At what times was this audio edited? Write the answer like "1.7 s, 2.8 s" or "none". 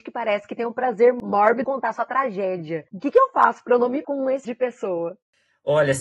1.6 s, 2.9 s, 4.0 s, 4.4 s